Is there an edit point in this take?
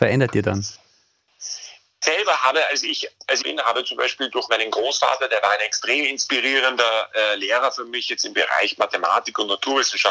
yes; 3 cuts; at 2.0 s, 3.4 s, 4.5 s

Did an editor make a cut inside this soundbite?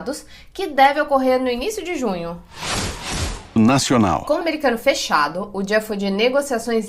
yes; 2 cuts; at 3.6 s, 4.4 s

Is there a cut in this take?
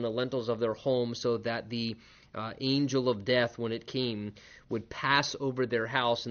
no; 0 cuts

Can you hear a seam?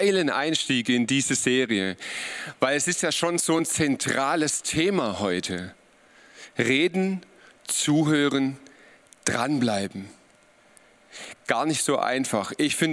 no; 0 cuts

